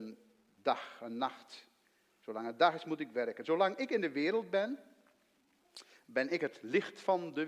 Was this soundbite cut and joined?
no; 0 cuts

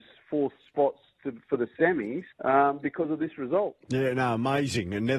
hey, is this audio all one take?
no; 1 cut; at 2.3 s

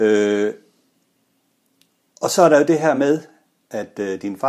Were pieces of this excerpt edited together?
no; 0 cuts

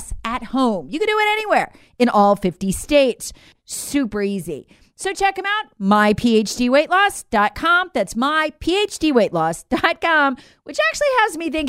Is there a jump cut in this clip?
no; 0 cuts

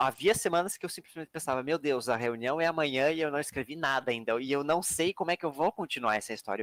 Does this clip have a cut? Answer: no; 0 cuts

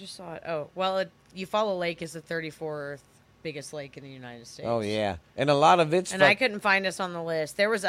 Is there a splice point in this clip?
no; 0 cuts

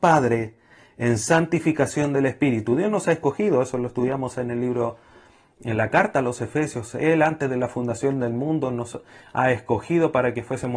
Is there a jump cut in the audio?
no; 0 cuts

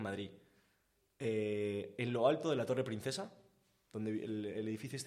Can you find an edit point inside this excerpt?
no; 0 cuts

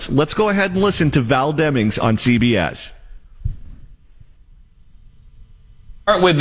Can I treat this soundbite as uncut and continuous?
yes; 0 cuts

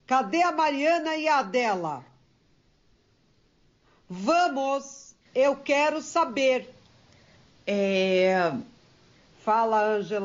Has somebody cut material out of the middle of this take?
no; 0 cuts

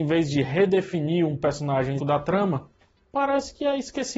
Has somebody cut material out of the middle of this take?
yes; 1 cut; at 2.0 s

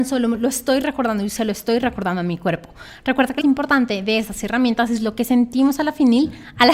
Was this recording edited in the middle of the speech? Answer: yes; 1 cut; at 3.4 s

